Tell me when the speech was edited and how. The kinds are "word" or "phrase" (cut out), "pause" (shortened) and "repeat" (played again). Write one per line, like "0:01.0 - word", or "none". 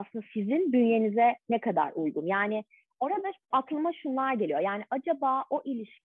0:03.5 - word